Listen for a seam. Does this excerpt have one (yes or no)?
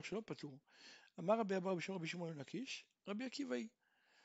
no